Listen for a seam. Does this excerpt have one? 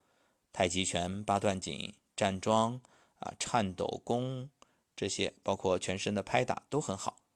no; 0 cuts

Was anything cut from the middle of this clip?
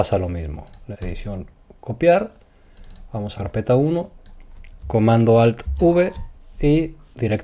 yes; 3 cuts; at 0.9 s, 3.3 s, 4.8 s

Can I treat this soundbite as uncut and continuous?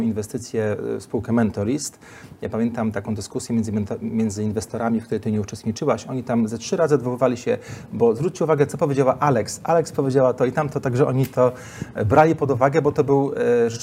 yes; 0 cuts

